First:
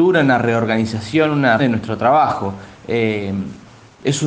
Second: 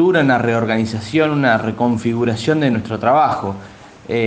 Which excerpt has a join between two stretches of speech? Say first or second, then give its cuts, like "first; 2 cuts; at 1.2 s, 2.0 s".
first; 2 cuts; at 1.6 s, 2.7 s